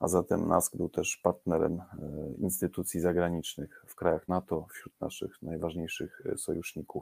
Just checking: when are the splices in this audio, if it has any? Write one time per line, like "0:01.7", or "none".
none